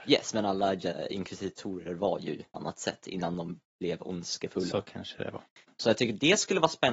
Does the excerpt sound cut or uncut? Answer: cut